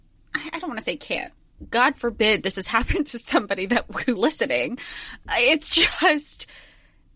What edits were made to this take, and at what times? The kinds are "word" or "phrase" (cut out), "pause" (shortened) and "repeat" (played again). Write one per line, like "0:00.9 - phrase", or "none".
0:04.2 - word

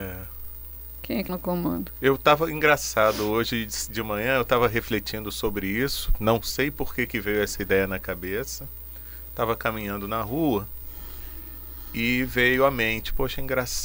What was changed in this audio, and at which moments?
0:01.3 - word

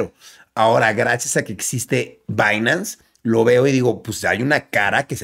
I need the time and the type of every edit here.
none

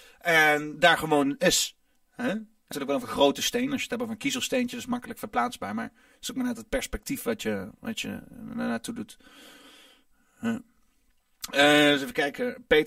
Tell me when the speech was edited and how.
0:02.7 - word

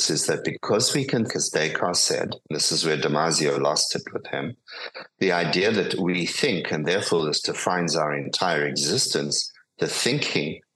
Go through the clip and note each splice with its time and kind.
0:01.3 - word
0:02.4 - pause

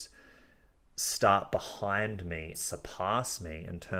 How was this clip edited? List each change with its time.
0:02.5 - word

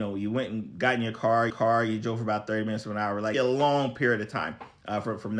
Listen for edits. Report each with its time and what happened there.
0:01.5 - repeat
0:03.3 - word

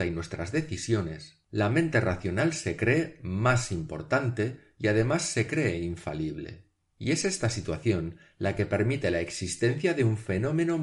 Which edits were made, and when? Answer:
none

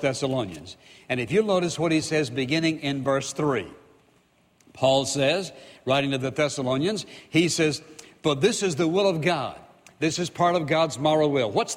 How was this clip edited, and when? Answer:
none

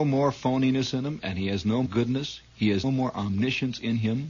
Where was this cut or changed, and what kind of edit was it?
0:01.9 - word
0:02.8 - word

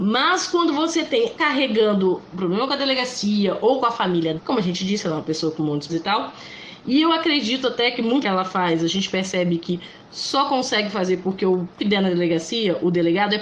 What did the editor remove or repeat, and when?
0:01.4 - word
0:04.4 - word
0:05.9 - word
0:08.2 - word
0:11.8 - word

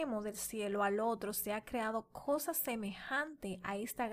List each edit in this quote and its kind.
none

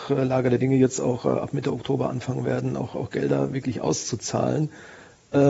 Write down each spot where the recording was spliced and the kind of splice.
none

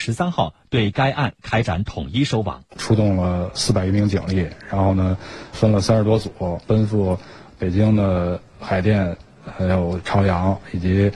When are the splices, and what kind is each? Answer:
0:05.5 - word

